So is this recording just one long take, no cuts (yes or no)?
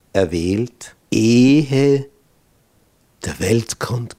no